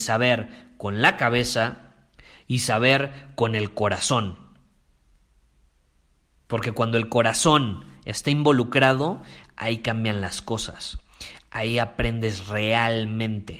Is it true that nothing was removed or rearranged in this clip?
yes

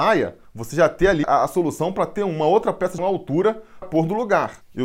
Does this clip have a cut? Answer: yes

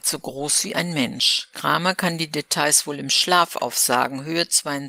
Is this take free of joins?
yes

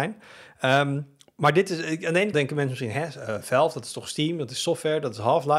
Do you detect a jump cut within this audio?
yes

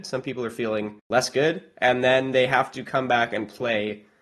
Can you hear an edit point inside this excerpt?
yes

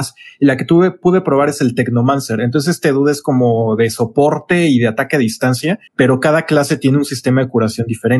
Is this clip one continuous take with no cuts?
no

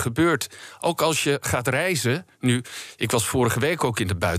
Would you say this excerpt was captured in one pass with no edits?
yes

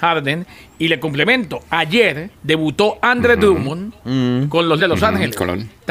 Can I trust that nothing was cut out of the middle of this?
no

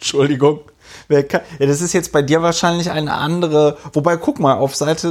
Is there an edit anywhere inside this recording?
no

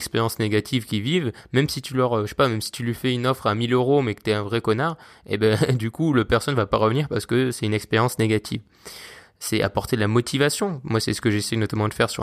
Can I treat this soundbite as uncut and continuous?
yes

